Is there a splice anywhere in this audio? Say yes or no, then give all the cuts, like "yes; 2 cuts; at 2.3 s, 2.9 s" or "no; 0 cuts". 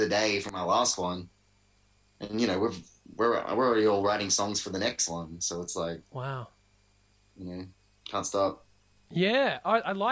no; 0 cuts